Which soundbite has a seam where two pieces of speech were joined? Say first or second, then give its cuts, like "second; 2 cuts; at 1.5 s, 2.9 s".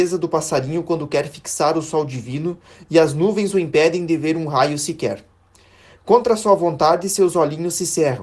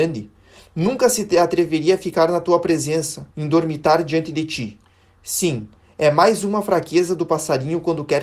second; 1 cut; at 3.3 s